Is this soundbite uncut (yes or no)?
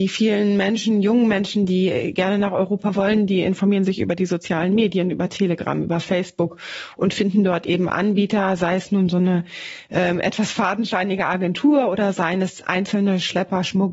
yes